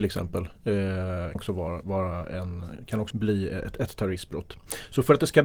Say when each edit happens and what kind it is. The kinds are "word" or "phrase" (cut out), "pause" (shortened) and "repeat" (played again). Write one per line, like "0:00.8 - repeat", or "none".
0:01.4 - word
0:03.1 - word